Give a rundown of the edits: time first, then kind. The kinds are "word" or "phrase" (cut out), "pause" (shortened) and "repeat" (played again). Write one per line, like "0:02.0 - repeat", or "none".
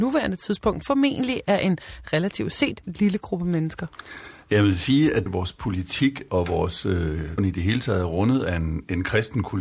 0:05.3 - phrase
0:07.4 - word